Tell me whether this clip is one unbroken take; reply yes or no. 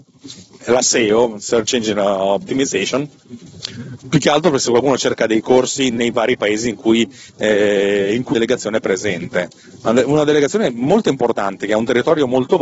no